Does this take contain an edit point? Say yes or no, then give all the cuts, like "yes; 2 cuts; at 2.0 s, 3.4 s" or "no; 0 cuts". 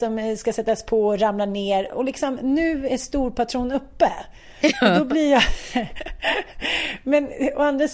no; 0 cuts